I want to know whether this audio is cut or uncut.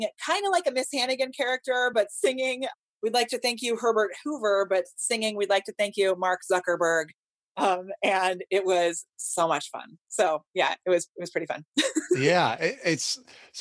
uncut